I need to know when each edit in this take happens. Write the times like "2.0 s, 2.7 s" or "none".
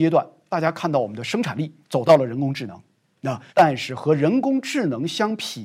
1.8 s, 3.5 s